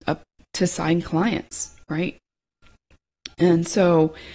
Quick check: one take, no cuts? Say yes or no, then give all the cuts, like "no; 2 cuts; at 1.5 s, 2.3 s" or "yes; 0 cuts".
yes; 0 cuts